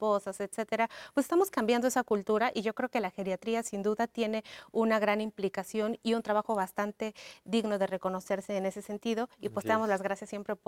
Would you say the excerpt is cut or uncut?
uncut